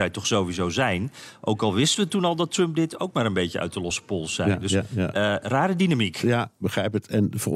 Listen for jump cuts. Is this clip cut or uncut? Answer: uncut